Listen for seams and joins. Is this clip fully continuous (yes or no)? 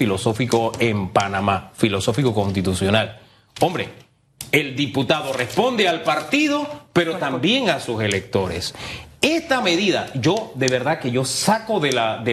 yes